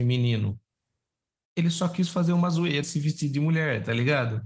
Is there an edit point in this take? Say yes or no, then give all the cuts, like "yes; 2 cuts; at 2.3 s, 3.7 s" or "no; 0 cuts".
yes; 1 cut; at 2.8 s